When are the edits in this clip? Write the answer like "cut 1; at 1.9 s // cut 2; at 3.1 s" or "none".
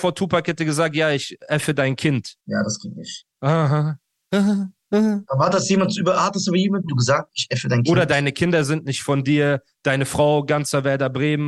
cut 1; at 2.4 s // cut 2; at 6.9 s